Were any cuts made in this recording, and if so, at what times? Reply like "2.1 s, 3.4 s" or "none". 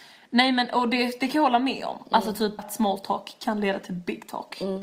2.6 s